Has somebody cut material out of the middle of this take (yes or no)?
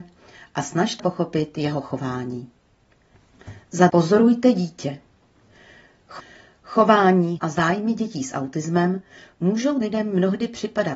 yes